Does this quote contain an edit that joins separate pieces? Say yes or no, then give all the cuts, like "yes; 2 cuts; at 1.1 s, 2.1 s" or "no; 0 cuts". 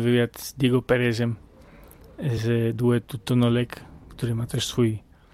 no; 0 cuts